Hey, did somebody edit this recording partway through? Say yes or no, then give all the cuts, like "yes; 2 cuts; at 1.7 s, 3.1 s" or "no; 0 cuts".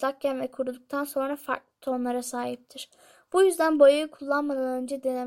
no; 0 cuts